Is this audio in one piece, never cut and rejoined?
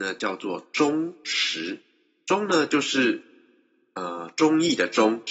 yes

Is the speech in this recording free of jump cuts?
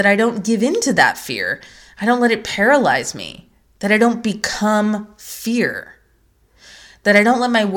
yes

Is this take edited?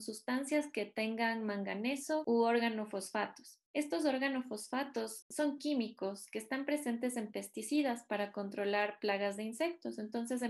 no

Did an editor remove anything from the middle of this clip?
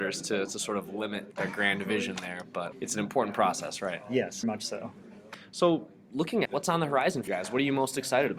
yes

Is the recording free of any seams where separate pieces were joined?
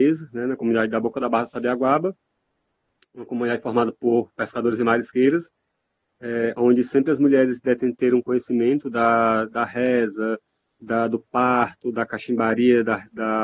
yes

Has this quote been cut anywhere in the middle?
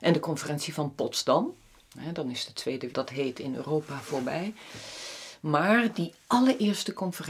yes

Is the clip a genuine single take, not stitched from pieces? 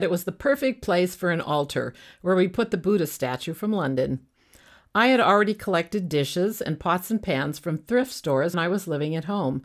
no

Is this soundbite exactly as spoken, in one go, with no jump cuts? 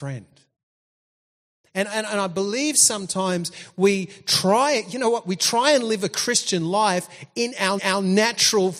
no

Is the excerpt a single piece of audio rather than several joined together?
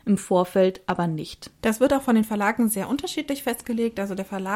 no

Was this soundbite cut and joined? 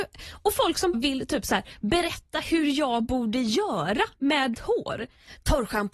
yes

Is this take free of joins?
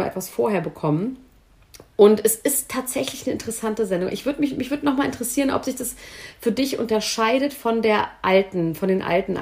yes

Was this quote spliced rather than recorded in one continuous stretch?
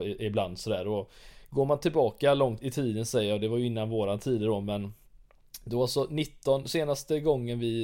yes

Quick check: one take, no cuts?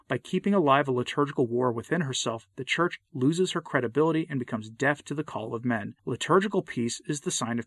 no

